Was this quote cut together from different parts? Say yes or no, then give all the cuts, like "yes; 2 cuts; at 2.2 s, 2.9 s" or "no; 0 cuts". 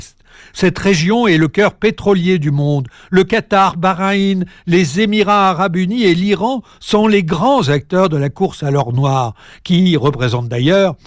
no; 0 cuts